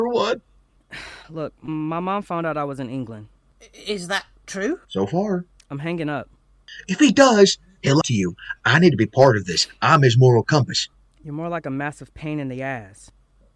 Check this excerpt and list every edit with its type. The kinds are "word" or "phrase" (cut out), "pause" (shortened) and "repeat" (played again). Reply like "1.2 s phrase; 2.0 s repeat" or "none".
4.8 s pause; 5.6 s pause; 8.0 s word; 10.9 s pause

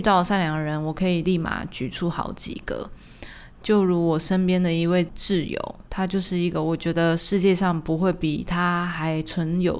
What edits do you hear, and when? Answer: 5.8 s pause

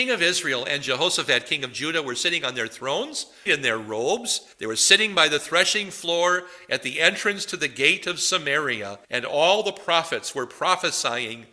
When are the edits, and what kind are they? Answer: 3.5 s word; 4.5 s pause; 9.0 s pause

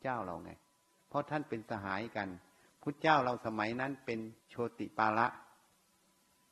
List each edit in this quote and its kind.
4.4 s pause

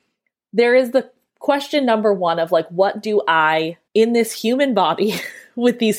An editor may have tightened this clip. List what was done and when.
3.9 s pause

